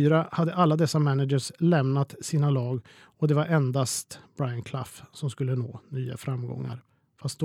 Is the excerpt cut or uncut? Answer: uncut